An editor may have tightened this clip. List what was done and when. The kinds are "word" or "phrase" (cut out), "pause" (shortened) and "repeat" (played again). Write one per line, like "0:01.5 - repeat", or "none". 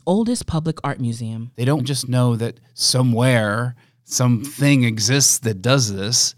0:01.8 - word